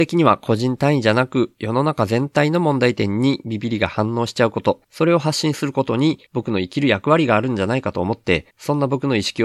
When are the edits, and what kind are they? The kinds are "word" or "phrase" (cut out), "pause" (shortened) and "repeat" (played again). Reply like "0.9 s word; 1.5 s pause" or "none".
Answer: 4.8 s pause; 6.3 s pause; 8.5 s pause